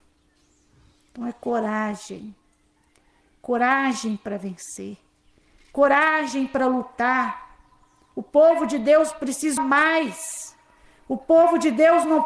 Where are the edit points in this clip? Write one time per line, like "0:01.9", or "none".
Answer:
0:09.6